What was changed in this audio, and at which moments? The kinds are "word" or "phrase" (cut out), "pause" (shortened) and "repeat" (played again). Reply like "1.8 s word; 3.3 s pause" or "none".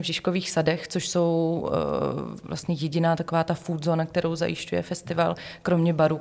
none